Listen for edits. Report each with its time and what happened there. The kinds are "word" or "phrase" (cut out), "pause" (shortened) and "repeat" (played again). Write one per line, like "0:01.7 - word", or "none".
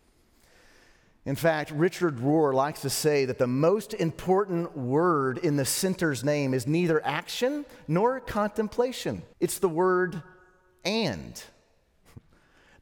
0:09.3 - pause